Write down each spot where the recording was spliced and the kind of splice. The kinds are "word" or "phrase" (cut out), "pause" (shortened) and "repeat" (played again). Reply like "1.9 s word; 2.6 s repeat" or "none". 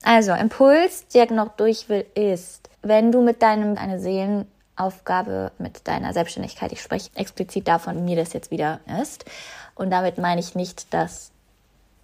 1.3 s word; 2.7 s pause; 3.7 s word; 5.6 s word; 7.1 s phrase; 7.9 s word; 8.9 s word